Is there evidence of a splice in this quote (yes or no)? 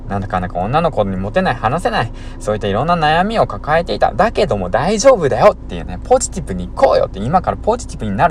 no